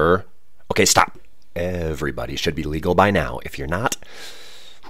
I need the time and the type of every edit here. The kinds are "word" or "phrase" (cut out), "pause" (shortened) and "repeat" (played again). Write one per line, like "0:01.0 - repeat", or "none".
none